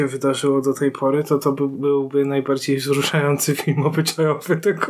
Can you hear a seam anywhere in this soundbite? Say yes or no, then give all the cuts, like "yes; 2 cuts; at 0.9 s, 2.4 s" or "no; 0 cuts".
no; 0 cuts